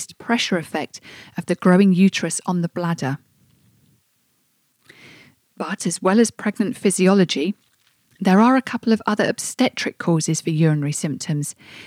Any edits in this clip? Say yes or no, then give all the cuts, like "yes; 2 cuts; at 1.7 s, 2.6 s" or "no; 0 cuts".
no; 0 cuts